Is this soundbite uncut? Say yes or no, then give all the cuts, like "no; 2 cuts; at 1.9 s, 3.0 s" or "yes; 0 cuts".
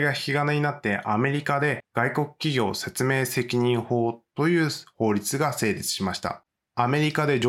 yes; 0 cuts